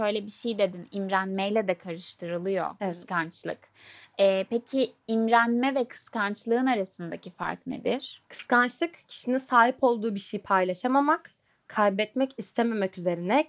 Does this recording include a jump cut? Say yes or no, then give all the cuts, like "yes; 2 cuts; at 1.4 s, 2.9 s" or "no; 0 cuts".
yes; 1 cut; at 8.3 s